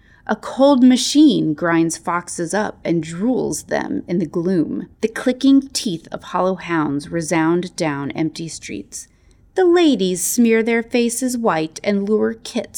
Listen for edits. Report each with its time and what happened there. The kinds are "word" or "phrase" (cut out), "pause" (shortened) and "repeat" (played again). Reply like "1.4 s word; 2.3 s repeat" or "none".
4.9 s pause